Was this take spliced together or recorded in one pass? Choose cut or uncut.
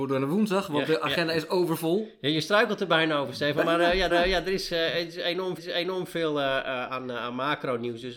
cut